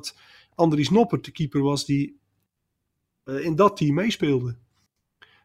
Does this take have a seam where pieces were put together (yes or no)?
no